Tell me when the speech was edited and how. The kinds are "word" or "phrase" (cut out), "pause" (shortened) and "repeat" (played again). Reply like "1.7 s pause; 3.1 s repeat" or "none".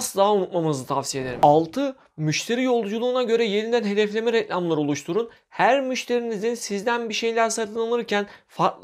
none